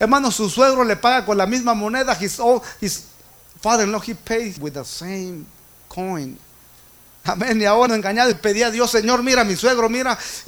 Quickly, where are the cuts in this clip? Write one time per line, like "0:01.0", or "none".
0:04.6
0:07.9
0:08.3